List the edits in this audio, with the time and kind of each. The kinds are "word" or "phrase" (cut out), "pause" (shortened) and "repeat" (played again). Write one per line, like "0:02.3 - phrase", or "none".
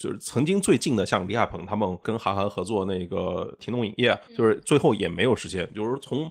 0:04.2 - pause